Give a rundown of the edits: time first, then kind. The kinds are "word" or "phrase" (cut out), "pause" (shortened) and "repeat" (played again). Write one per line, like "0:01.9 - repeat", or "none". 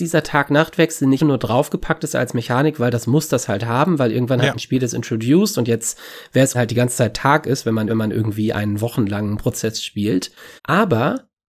0:01.2 - word
0:06.5 - phrase
0:07.9 - repeat
0:10.6 - pause

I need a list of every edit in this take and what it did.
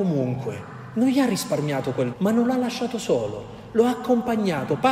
0:02.1 - word

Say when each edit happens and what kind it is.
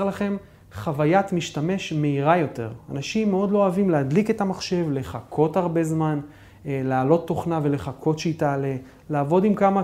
none

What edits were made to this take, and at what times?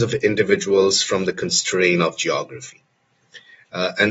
none

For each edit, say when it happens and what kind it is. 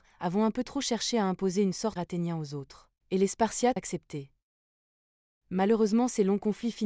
0:02.0 - word
0:03.0 - pause
0:03.8 - phrase

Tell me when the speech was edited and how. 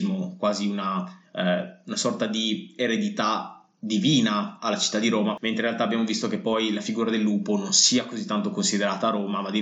none

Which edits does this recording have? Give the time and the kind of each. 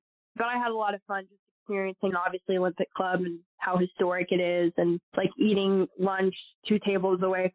0:02.1 - phrase
0:05.1 - pause

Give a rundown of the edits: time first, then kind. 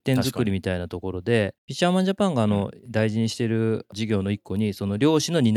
0:01.6 - pause

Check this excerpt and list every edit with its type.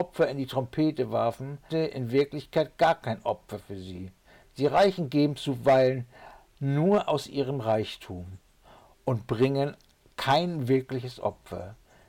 0:01.7 - word

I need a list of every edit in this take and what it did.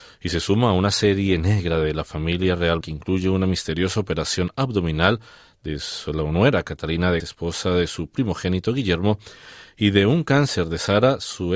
0:02.8 - word
0:07.2 - word

